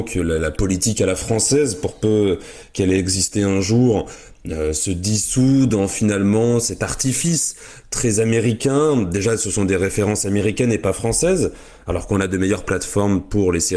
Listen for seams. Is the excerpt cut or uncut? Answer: uncut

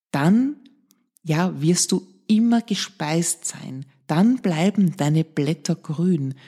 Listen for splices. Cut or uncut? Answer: uncut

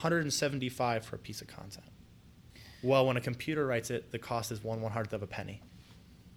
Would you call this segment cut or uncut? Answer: uncut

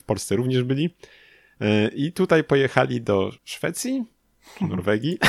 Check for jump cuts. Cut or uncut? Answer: cut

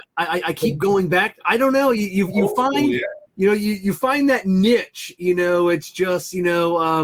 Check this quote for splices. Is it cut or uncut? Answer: cut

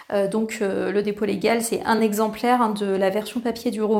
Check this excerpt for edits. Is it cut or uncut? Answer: uncut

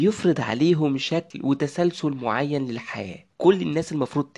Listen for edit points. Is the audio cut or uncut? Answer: uncut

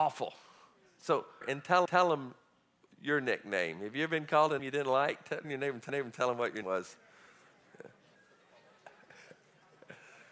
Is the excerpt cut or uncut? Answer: cut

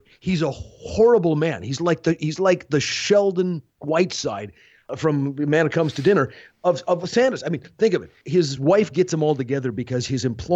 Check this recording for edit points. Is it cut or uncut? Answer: uncut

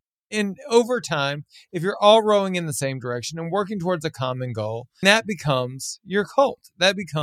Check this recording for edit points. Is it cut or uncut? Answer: cut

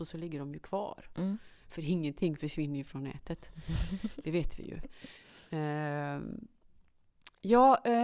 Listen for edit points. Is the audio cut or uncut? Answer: uncut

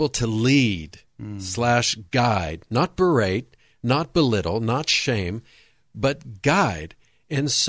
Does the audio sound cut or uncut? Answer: uncut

